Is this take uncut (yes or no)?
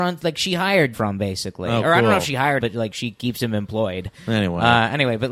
no